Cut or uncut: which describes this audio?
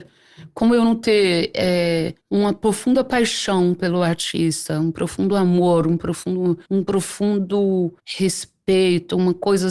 cut